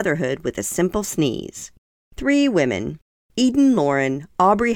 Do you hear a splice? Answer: no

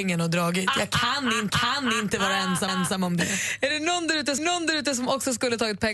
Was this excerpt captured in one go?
no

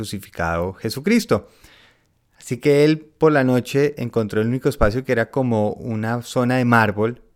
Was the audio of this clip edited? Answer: no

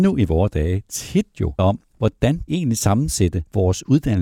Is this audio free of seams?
no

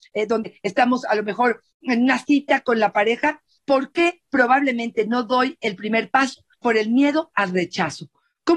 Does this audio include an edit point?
no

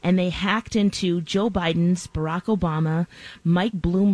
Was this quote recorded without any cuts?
yes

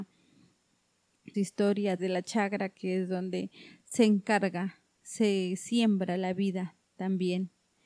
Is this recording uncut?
no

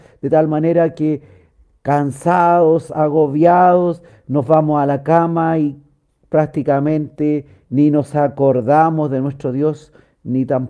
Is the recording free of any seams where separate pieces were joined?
yes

